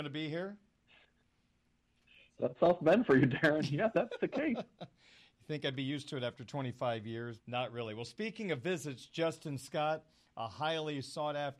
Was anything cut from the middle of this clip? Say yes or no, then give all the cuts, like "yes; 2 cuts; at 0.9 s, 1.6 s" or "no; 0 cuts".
yes; 1 cut; at 7.4 s